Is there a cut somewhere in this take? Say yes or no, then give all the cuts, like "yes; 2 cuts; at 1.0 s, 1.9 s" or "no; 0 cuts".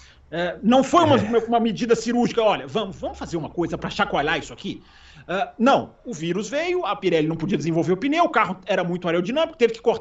no; 0 cuts